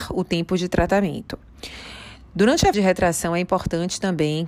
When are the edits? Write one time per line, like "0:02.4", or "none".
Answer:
0:02.7